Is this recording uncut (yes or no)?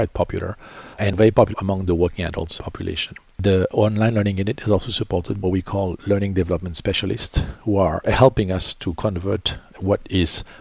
no